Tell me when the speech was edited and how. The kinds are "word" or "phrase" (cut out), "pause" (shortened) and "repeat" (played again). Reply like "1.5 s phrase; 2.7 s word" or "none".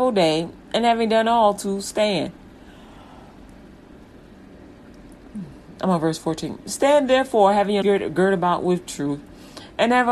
7.8 s word